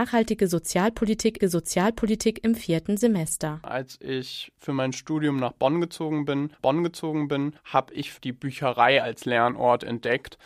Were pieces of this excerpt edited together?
yes; 3 cuts; at 1.4 s, 6.6 s, 8.2 s

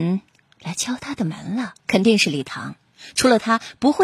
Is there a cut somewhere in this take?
yes; 1 cut; at 1.8 s

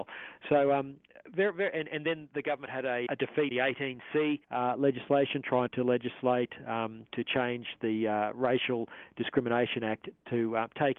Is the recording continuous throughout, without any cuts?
no; 5 cuts; at 3.1 s, 3.5 s, 4.4 s, 5.7 s, 7.1 s

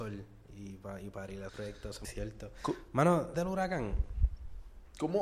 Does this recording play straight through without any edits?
no; 3 cuts; at 1.5 s, 2.0 s, 3.3 s

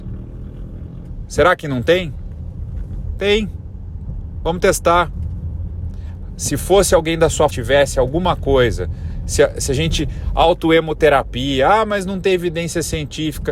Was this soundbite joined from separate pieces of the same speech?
yes; 1 cut; at 7.5 s

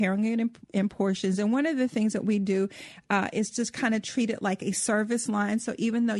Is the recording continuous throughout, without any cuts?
yes; 0 cuts

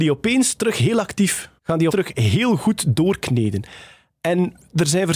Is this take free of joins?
no; 2 cuts; at 1.6 s, 1.9 s

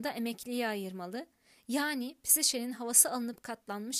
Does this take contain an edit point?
no; 0 cuts

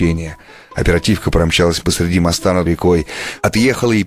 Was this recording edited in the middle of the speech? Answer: yes; 2 cuts; at 1.8 s, 2.7 s

